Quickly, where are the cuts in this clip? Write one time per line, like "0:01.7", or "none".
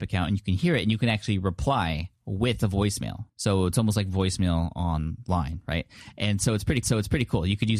0:03.3
0:06.8